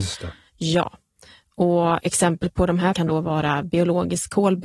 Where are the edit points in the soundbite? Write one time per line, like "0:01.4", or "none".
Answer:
0:02.9